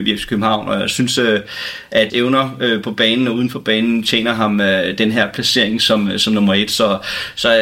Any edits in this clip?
yes; 1 cut; at 2.1 s

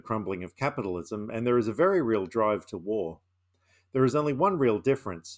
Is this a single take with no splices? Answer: yes; 0 cuts

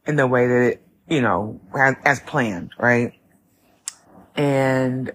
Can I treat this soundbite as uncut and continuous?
no; 1 cut; at 4.0 s

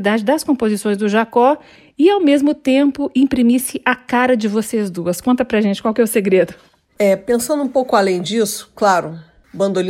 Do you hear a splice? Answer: no; 0 cuts

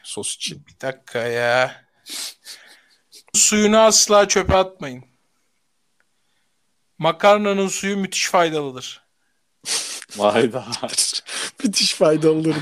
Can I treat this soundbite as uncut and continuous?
no; 1 cut; at 3.3 s

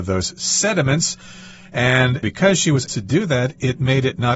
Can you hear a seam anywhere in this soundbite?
yes; 1 cut; at 2.9 s

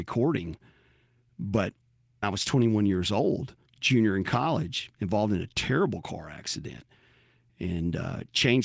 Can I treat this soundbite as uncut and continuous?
no; 2 cuts; at 2.2 s, 3.7 s

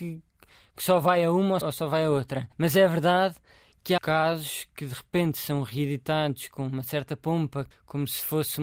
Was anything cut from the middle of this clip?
yes; 4 cuts; at 1.6 s, 2.5 s, 4.0 s, 7.7 s

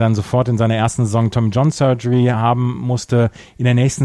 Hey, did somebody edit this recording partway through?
no; 0 cuts

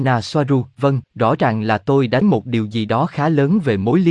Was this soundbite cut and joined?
yes; 2 cuts; at 1.0 s, 2.2 s

